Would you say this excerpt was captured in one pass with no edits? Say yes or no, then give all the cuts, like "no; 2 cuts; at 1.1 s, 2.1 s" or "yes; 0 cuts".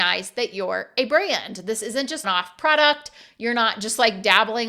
no; 1 cut; at 2.2 s